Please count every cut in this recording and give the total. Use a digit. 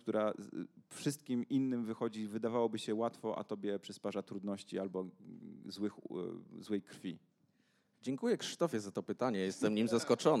0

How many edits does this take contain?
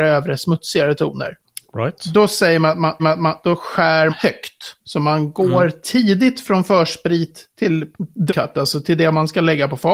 3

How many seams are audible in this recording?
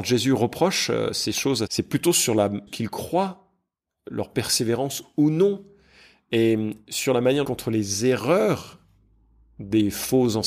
3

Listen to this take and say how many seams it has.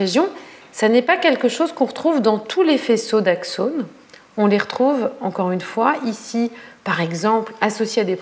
0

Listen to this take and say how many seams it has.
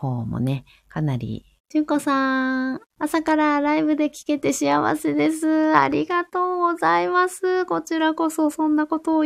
2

